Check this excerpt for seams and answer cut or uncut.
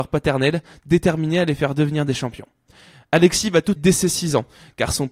cut